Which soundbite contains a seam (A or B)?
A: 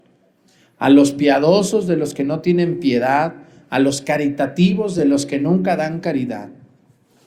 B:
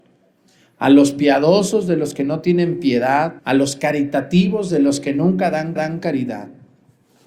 B